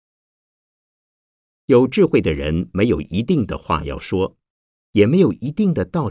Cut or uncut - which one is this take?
uncut